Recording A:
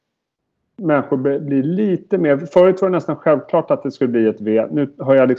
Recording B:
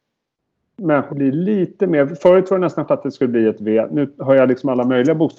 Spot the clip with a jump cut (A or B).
B